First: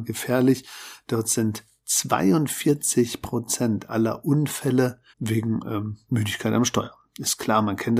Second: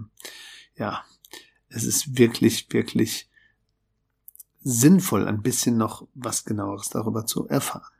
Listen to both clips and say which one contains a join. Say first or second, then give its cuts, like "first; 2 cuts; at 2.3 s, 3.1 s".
first; 1 cut; at 5.1 s